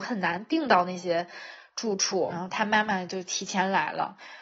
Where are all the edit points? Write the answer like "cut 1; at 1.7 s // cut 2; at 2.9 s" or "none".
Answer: cut 1; at 2.3 s